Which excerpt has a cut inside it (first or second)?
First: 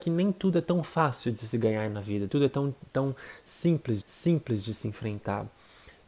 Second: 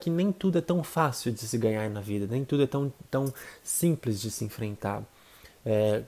first